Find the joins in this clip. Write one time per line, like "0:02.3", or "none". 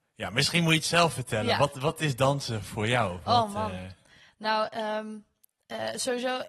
none